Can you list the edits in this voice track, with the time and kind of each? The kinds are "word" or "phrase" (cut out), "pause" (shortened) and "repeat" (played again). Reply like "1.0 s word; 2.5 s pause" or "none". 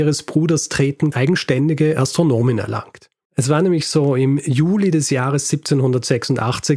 1.1 s phrase